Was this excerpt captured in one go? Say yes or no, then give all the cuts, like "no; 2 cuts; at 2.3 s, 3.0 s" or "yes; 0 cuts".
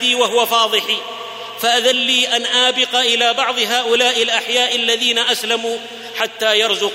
yes; 0 cuts